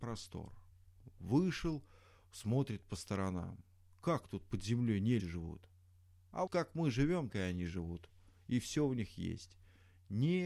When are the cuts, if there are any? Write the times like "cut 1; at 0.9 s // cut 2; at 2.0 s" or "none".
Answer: cut 1; at 5.2 s // cut 2; at 6.5 s // cut 3; at 7.3 s